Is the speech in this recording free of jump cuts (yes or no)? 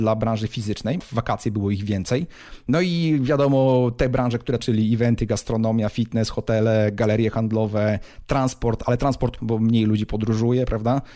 no